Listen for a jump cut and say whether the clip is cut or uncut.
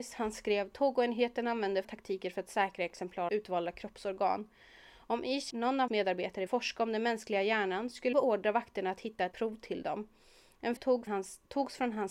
cut